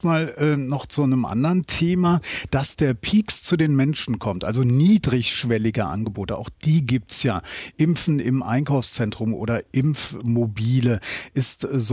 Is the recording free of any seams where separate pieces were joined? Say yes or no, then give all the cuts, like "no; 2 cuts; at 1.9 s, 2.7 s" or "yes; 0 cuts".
yes; 0 cuts